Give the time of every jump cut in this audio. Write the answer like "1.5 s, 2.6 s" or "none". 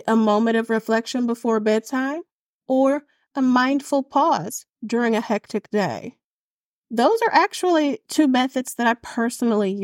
none